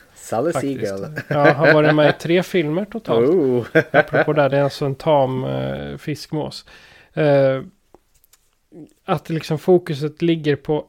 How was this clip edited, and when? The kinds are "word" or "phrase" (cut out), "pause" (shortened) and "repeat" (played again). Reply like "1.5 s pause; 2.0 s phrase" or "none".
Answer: none